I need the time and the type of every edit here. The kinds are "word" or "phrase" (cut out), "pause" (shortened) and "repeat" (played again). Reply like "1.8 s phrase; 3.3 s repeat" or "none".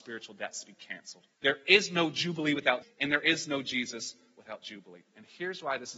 1.3 s pause; 2.8 s word